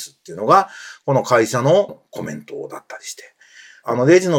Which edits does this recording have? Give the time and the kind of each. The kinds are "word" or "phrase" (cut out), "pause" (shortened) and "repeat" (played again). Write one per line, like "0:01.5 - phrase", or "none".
0:01.9 - word